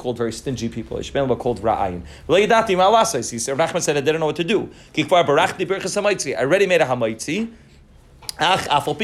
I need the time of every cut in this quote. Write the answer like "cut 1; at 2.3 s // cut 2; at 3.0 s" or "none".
none